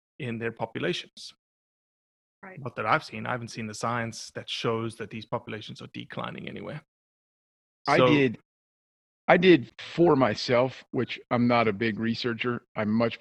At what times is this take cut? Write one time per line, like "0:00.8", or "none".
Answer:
none

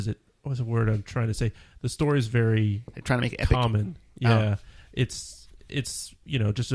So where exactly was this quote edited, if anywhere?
none

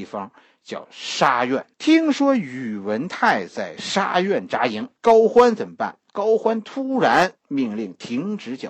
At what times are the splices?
0:01.7
0:05.0
0:07.4

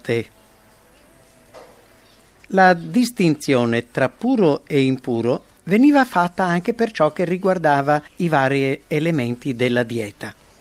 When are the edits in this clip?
0:02.2
0:08.1

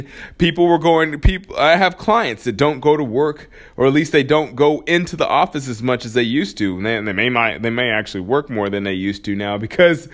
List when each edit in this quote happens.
none

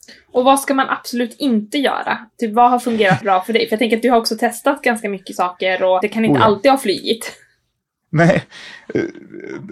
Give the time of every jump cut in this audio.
0:03.2
0:06.0

